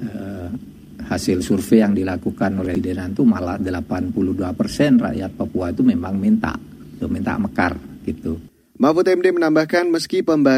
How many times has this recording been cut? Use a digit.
0